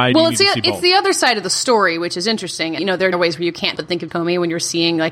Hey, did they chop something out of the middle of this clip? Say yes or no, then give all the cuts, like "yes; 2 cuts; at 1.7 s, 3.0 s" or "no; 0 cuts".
yes; 4 cuts; at 2.8 s, 3.1 s, 3.8 s, 4.1 s